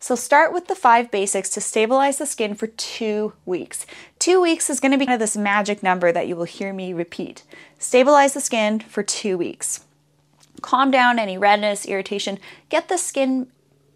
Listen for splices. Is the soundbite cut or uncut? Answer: cut